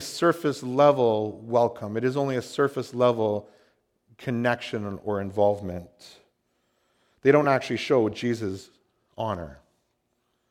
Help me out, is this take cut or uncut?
uncut